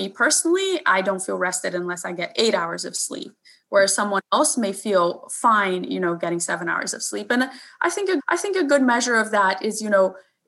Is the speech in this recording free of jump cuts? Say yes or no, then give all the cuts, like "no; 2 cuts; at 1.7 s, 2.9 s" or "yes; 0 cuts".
no; 1 cut; at 8.2 s